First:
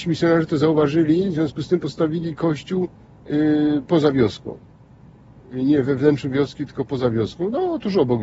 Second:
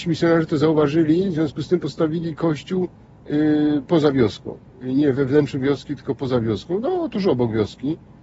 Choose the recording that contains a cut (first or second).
second